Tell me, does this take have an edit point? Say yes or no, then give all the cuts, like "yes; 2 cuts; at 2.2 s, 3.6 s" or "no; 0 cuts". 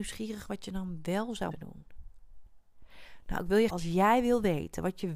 yes; 2 cuts; at 1.5 s, 3.7 s